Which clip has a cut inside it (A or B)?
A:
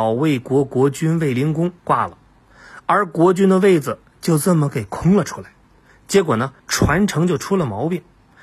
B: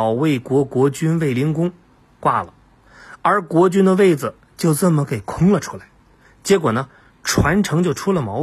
A